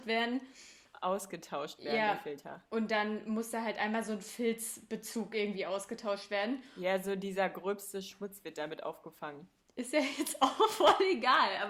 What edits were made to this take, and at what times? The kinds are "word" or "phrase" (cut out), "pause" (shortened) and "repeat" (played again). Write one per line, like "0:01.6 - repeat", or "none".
none